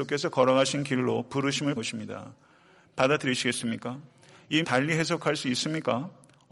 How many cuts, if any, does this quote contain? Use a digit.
2